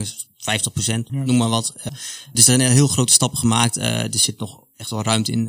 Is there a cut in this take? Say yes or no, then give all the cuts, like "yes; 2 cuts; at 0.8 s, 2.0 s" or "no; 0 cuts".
yes; 3 cuts; at 1.1 s, 1.9 s, 2.3 s